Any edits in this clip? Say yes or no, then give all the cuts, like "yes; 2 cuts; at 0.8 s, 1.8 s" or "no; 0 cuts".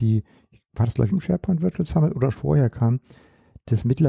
yes; 2 cuts; at 1.1 s, 2.3 s